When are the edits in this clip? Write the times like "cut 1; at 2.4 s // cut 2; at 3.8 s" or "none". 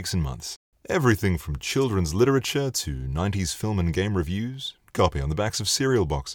cut 1; at 4.9 s